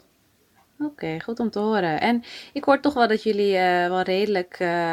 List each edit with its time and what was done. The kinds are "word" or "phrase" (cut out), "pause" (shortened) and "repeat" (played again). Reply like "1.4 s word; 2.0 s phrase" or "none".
none